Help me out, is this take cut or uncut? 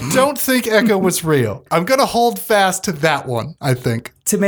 uncut